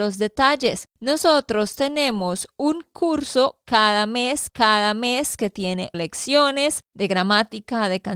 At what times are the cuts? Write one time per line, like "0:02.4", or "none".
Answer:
0:00.9
0:04.5
0:05.9
0:06.9